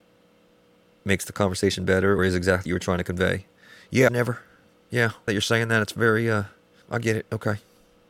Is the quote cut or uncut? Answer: cut